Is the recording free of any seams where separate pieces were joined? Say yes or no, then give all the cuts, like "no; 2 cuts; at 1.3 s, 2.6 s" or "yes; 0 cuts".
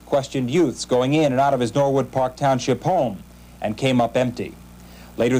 yes; 0 cuts